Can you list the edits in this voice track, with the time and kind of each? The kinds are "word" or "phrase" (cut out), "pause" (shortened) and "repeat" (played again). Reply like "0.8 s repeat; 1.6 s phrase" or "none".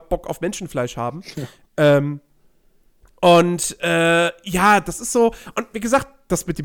none

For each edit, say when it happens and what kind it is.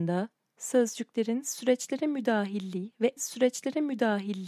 3.2 s repeat

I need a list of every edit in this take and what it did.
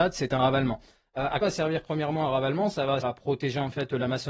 1.4 s word; 3.0 s word

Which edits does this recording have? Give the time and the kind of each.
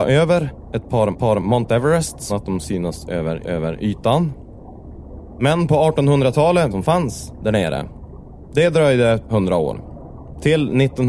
1.1 s repeat; 2.3 s word; 2.6 s word; 3.4 s repeat; 6.7 s phrase; 9.3 s word

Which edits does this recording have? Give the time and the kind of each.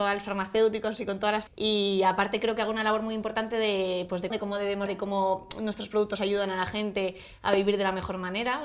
1.5 s word; 4.3 s word; 4.9 s word

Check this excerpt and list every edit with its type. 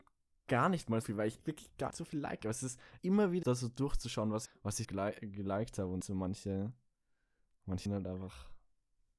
1.0 s word; 1.4 s word; 1.9 s word; 3.0 s word; 3.4 s word; 4.5 s word; 4.8 s word; 6.0 s word; 7.9 s word

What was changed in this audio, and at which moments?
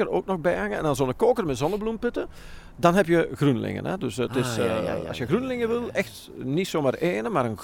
none

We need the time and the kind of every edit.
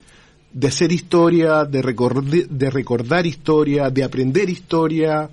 none

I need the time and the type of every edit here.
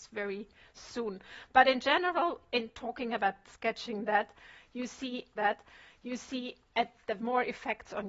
3.4 s word; 5.4 s repeat; 7.2 s phrase

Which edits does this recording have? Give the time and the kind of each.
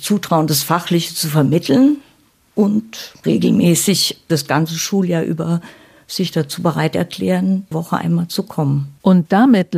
3.2 s word; 7.7 s word

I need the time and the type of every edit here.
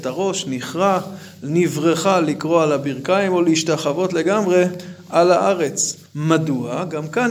6.1 s pause

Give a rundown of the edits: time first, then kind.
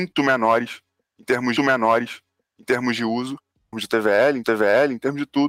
1.6 s repeat; 3.7 s word; 4.4 s repeat

